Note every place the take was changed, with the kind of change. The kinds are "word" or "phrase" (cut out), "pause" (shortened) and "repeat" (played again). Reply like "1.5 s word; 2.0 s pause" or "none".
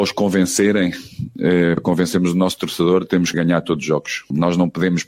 3.3 s word